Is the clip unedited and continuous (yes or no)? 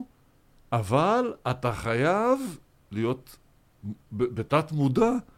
yes